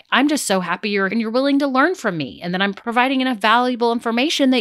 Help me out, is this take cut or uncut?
cut